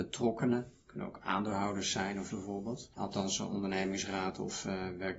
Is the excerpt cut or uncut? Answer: cut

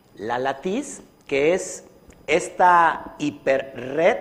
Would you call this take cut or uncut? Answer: uncut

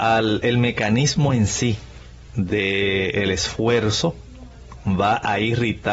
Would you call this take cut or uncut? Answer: uncut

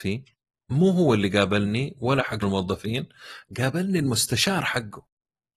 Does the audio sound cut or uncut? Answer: cut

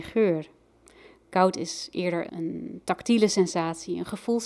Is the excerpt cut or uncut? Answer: cut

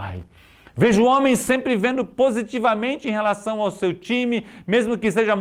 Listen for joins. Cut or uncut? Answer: uncut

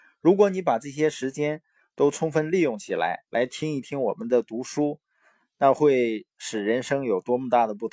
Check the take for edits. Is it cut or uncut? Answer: uncut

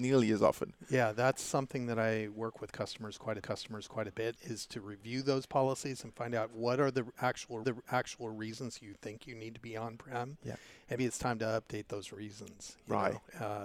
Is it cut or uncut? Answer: cut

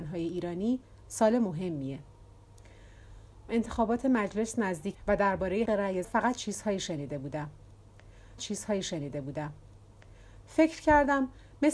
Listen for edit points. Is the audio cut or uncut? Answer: cut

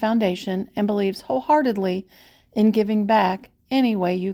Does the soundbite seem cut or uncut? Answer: uncut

